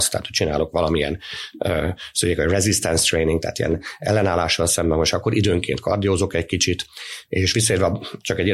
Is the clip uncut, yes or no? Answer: yes